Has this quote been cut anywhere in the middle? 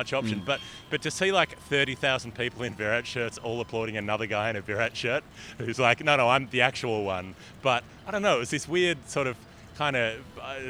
no; 0 cuts

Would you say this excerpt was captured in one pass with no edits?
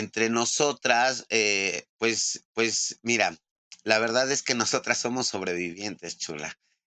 no; 1 cut; at 2.5 s

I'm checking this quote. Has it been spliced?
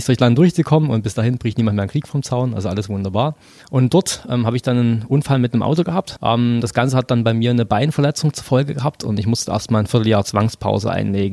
no; 0 cuts

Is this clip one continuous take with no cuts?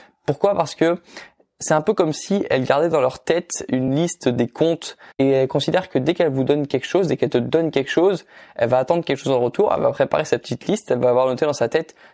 yes; 0 cuts

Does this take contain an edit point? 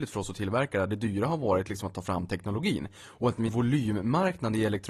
yes; 1 cut; at 3.5 s

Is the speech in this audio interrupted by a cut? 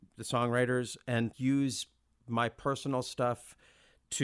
yes; 1 cut; at 1.3 s

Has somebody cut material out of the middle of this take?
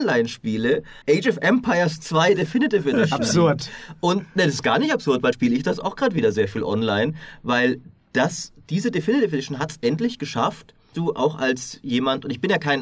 yes; 3 cuts; at 1.0 s, 5.3 s, 10.9 s

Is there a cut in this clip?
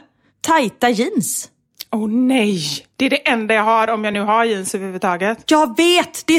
no; 0 cuts

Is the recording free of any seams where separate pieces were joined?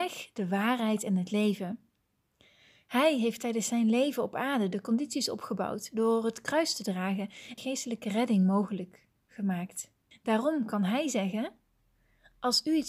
no; 2 cuts; at 7.6 s, 10.1 s

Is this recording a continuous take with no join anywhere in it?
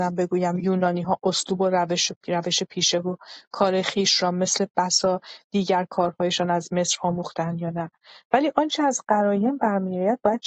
yes; 0 cuts

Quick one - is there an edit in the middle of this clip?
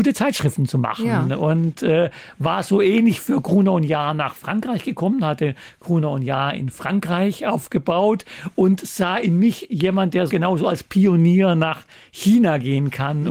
yes; 1 cut; at 10.3 s

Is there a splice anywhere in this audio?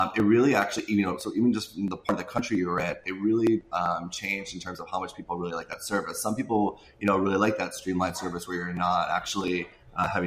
no; 0 cuts

